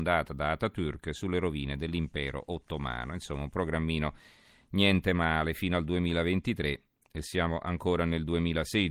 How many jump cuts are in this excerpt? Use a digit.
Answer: 0